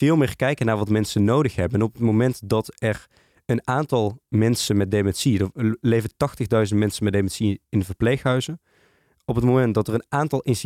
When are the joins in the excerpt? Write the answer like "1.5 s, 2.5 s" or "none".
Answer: none